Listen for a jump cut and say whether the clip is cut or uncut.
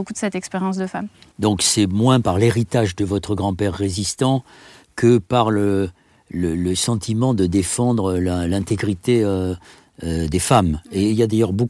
uncut